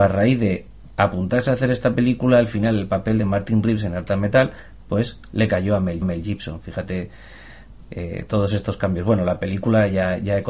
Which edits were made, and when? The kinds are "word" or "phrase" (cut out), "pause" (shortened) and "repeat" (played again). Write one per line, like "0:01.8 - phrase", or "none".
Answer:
0:06.0 - repeat

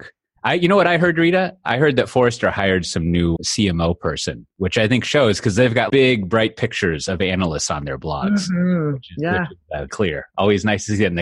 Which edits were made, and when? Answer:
0:03.4 - word
0:05.9 - word
0:09.9 - word

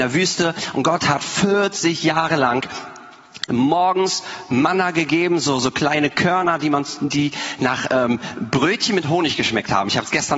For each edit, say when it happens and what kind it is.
none

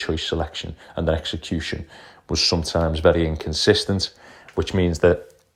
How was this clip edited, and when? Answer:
none

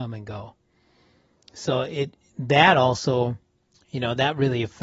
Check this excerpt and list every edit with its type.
0:03.6 - pause

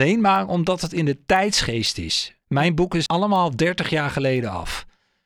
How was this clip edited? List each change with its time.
0:02.4 - pause
0:03.1 - phrase

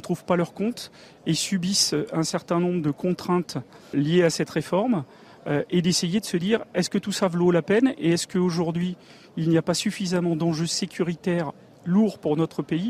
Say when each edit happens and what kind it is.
0:03.9 - word

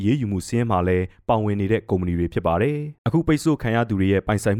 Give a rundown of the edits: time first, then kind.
0:03.0 - pause

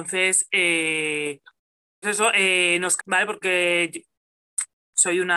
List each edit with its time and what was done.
0:02.0 - word
0:03.0 - word
0:03.4 - word

